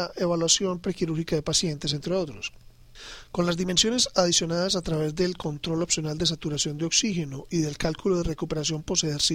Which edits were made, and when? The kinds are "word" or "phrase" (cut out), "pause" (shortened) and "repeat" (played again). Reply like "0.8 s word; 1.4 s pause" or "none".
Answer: none